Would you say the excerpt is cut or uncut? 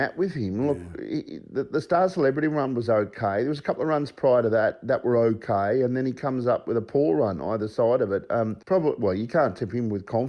cut